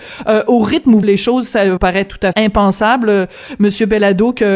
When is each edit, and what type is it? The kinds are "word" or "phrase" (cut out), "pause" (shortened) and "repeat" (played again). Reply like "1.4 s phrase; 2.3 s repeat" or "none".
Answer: 1.0 s word; 1.8 s word; 2.3 s word